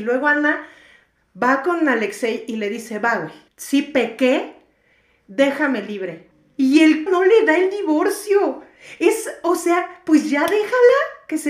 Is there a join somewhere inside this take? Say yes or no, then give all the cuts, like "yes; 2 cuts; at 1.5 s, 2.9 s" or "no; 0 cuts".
yes; 2 cuts; at 3.5 s, 7.1 s